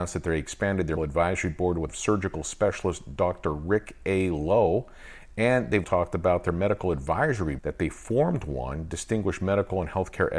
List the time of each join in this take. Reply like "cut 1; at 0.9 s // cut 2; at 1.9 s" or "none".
cut 1; at 1.0 s // cut 2; at 1.9 s // cut 3; at 5.8 s // cut 4; at 7.6 s